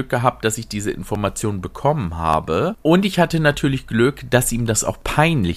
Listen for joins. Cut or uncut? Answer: uncut